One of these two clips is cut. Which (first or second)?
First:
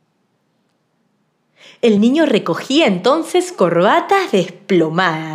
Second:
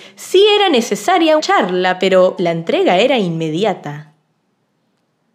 second